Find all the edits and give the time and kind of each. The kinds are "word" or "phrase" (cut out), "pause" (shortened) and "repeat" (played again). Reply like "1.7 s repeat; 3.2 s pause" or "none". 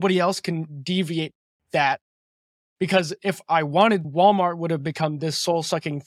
4.0 s word